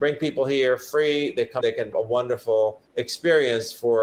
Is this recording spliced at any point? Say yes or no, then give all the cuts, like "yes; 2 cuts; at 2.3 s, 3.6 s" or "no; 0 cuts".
yes; 3 cuts; at 1.6 s, 1.9 s, 2.9 s